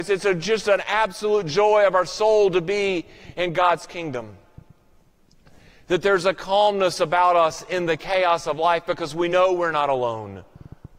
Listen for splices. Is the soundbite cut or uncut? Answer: uncut